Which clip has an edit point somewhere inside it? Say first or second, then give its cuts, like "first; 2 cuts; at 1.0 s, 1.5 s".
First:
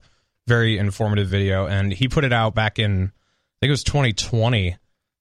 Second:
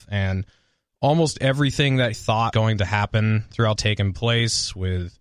second; 3 cuts; at 2.1 s, 2.5 s, 3.8 s